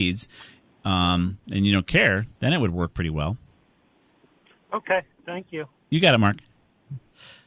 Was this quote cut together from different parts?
no; 0 cuts

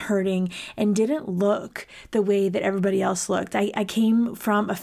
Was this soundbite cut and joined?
no; 0 cuts

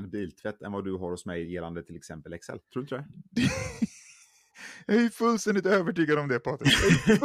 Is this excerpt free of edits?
no; 1 cut; at 2.6 s

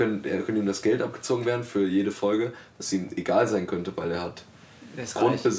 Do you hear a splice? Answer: no; 0 cuts

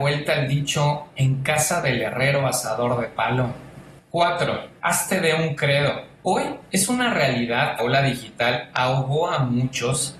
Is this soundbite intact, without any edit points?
no; 1 cut; at 7.8 s

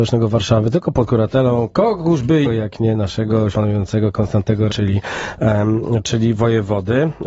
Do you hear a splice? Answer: yes; 3 cuts; at 2.4 s, 3.5 s, 4.7 s

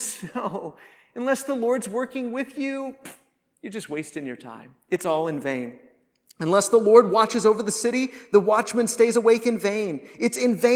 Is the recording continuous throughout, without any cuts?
yes; 0 cuts

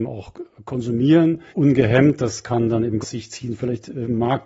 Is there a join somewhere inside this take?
yes; 2 cuts; at 1.5 s, 3.0 s

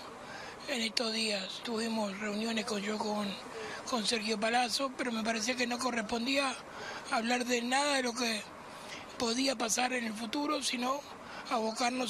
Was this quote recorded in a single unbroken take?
no; 3 cuts; at 1.6 s, 2.8 s, 9.1 s

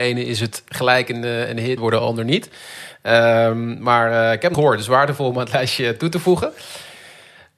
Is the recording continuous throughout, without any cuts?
no; 2 cuts; at 1.8 s, 4.5 s

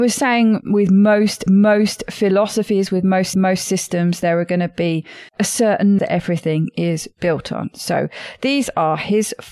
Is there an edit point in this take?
yes; 4 cuts; at 1.5 s, 3.3 s, 5.3 s, 6.0 s

